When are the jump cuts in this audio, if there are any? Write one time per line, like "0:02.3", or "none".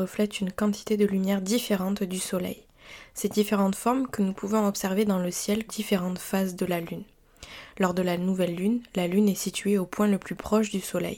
0:05.7